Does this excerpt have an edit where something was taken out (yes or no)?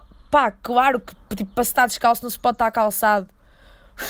no